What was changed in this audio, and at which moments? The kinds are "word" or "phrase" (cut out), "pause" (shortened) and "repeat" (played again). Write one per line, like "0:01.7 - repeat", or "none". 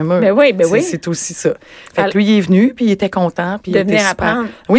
none